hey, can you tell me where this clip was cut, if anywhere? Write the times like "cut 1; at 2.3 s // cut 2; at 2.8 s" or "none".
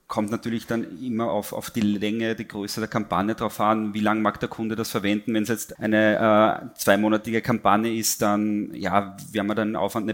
cut 1; at 5.7 s